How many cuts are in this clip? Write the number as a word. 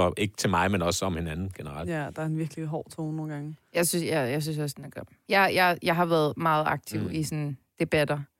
zero